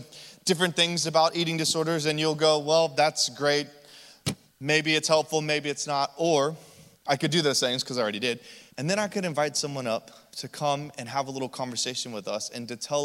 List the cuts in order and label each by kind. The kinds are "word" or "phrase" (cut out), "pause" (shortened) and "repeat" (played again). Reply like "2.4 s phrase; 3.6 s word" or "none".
8.7 s pause